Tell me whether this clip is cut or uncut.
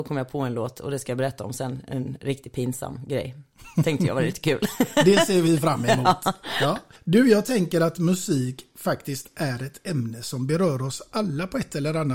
uncut